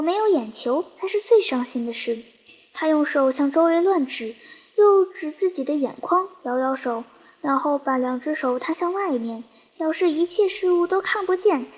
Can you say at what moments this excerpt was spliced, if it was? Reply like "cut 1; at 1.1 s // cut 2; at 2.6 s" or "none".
none